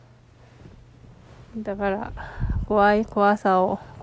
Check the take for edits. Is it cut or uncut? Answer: cut